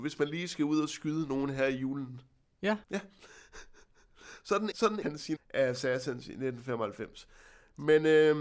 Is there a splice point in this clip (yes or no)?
yes